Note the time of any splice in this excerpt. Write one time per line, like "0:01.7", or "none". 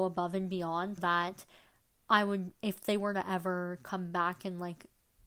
0:01.0